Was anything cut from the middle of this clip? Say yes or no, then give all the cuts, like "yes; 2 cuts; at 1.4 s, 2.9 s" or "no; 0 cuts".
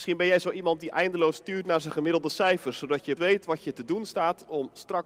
yes; 1 cut; at 3.2 s